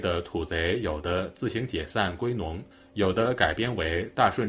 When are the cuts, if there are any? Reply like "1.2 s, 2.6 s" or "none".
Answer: none